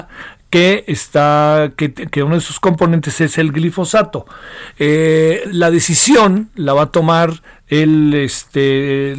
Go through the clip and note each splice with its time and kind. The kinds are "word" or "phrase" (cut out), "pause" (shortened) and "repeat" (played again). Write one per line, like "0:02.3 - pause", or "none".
0:05.4 - word